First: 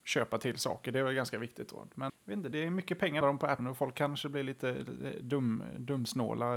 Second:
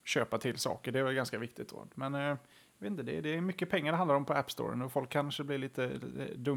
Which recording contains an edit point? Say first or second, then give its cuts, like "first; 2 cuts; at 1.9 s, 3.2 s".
first; 4 cuts; at 2.1 s, 2.5 s, 3.2 s, 3.6 s